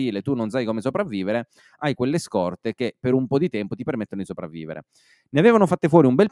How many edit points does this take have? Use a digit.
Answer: 0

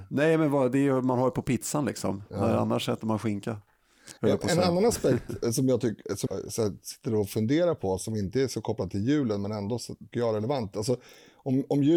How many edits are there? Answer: 3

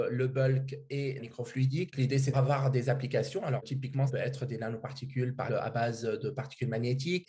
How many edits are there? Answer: 4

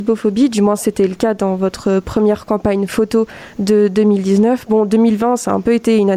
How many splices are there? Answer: 0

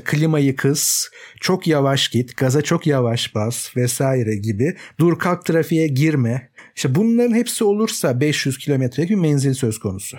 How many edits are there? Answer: 0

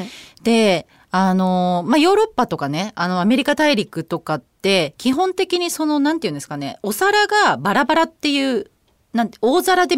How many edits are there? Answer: 0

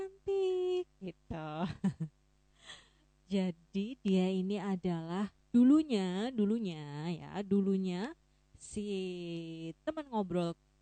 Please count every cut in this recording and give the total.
0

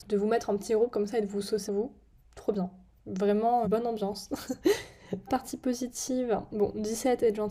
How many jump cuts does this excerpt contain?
3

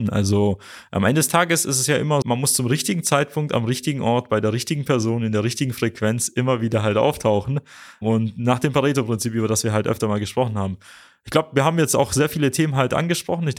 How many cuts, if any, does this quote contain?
1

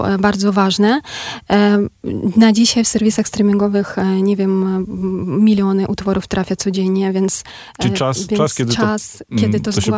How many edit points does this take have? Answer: 0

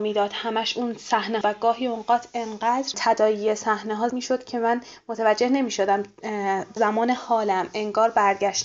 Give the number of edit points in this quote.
4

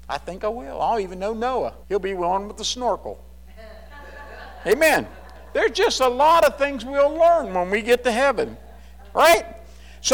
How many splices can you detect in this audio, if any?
1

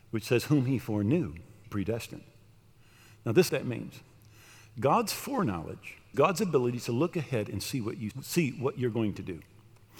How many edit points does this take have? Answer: 4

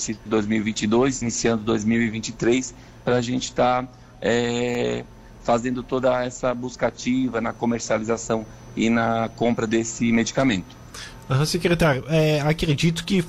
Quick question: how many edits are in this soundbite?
0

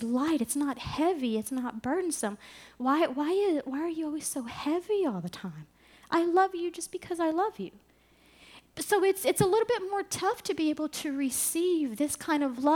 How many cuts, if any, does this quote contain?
0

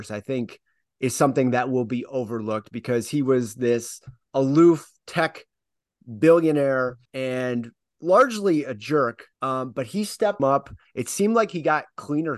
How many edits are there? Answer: 3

